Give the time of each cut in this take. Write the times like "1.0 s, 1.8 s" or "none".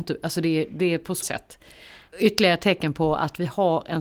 1.2 s, 2.1 s